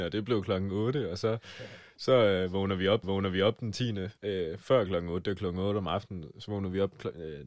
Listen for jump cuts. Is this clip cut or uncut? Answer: cut